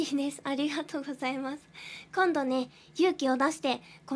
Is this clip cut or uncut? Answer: uncut